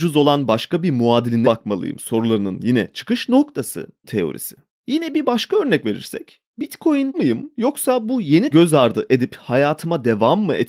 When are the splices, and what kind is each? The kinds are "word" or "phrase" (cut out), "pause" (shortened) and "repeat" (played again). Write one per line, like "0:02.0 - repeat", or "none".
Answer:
0:01.4 - word
0:04.0 - word
0:07.1 - word
0:08.5 - word